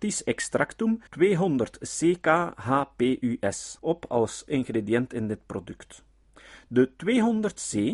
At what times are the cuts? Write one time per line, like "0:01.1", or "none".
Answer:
0:01.1
0:03.8
0:04.5